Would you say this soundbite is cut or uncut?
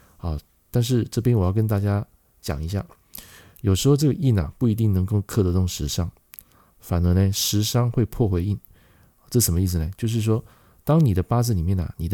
uncut